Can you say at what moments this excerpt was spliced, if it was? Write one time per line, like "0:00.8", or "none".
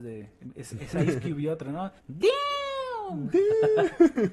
0:02.0